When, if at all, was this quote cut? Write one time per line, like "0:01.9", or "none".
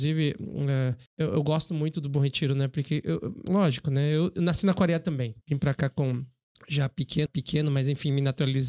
0:01.1
0:03.5
0:05.4
0:06.5
0:07.3